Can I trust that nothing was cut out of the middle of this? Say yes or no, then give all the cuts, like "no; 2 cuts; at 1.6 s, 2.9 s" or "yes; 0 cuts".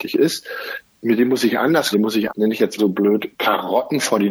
no; 3 cuts; at 1.9 s, 2.3 s, 2.8 s